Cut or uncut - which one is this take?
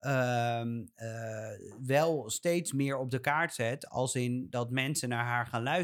uncut